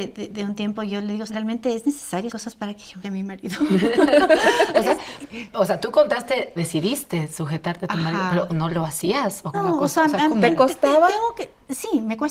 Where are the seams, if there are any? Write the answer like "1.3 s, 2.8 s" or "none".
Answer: 1.3 s, 2.3 s, 3.0 s, 6.6 s, 8.5 s, 9.5 s

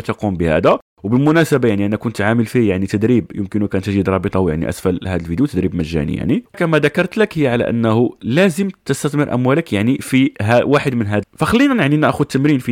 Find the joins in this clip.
6.5 s, 11.2 s

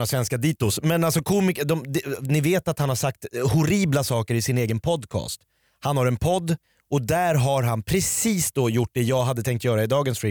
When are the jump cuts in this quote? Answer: 6.6 s

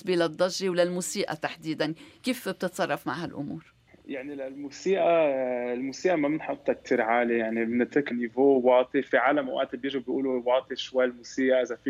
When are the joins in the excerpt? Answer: 3.9 s, 8.1 s

